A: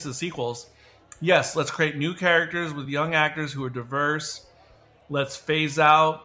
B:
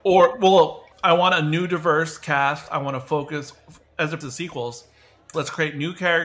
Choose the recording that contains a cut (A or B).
B